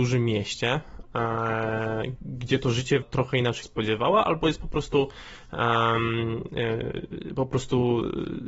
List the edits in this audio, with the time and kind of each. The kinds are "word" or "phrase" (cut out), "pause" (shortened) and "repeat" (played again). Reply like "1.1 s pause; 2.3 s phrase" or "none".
2.2 s word; 3.0 s word; 3.6 s phrase